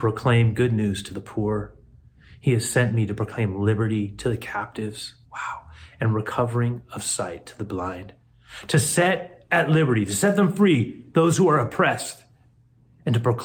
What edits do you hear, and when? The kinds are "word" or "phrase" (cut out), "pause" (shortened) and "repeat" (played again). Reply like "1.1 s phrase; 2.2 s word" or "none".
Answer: 5.2 s pause